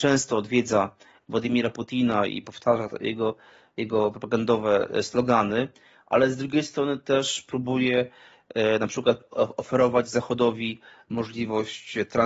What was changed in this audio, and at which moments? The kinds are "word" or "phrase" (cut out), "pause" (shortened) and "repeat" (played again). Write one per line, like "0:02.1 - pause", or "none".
none